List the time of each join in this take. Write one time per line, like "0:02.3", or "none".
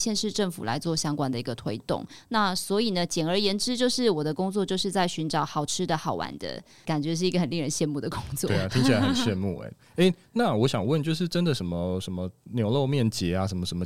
none